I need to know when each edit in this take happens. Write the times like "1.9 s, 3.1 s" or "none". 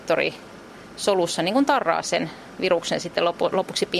none

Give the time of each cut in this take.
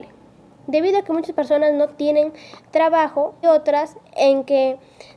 3.4 s

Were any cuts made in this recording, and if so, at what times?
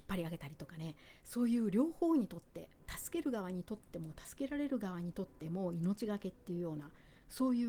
2.8 s

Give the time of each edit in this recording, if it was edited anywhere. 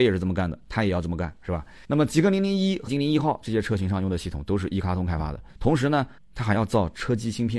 1.8 s, 2.9 s, 5.5 s, 6.2 s

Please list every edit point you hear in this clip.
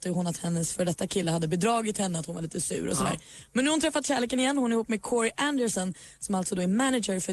none

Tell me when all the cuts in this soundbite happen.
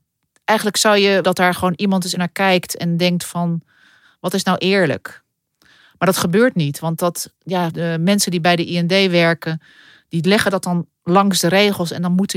1.2 s, 2.1 s, 7.4 s

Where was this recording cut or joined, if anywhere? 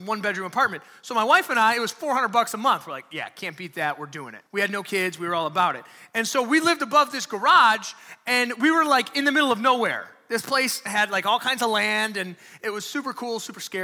4.5 s

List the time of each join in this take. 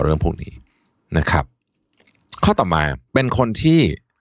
3.1 s

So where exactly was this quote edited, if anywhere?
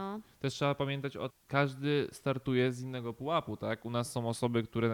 1.3 s

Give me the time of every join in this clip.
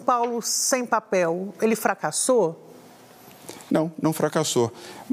none

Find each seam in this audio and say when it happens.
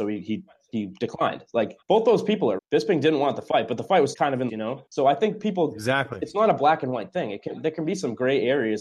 1.8 s, 2.6 s, 4.1 s, 4.5 s, 4.9 s

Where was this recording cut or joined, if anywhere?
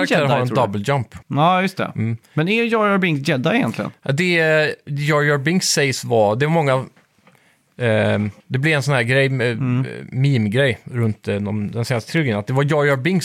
1.2 s, 2.2 s, 8.4 s

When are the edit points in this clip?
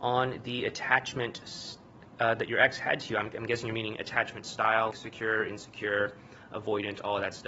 4.9 s

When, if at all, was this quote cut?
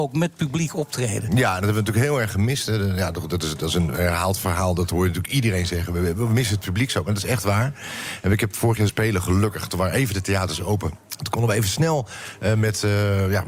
8.9 s, 11.0 s

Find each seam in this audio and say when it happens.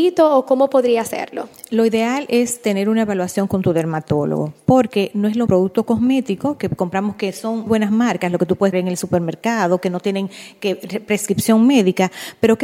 5.5 s, 7.7 s, 8.7 s

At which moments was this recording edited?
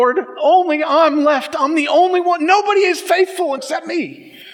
3.6 s

